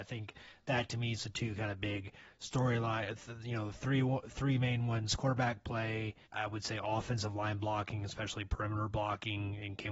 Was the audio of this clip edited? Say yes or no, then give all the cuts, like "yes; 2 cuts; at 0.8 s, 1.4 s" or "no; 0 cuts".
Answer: yes; 1 cut; at 6.3 s